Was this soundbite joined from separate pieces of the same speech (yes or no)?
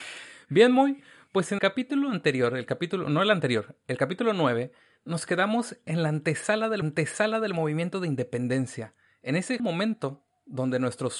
yes